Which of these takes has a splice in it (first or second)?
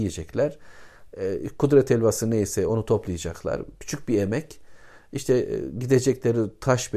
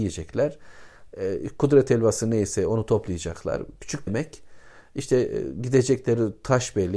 second